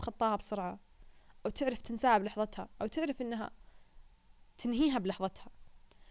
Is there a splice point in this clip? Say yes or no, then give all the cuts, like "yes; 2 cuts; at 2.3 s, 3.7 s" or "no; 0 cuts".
no; 0 cuts